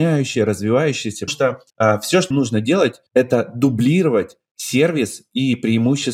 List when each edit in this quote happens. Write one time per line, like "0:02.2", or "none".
0:01.3
0:01.7
0:02.3
0:03.1